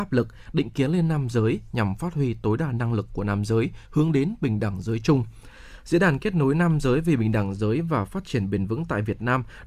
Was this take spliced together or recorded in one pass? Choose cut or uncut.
uncut